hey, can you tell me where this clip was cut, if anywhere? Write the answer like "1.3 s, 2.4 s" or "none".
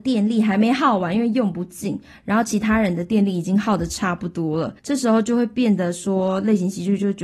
4.8 s

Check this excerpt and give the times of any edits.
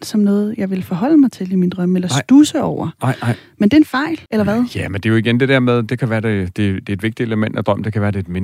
4.3 s

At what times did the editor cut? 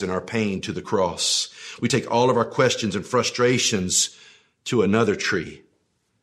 none

